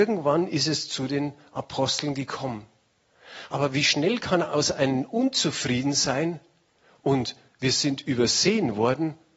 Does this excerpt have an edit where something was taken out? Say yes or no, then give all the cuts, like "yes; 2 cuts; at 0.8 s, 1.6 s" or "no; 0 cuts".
no; 0 cuts